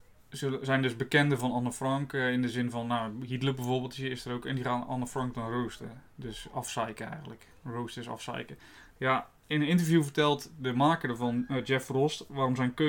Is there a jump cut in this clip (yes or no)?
no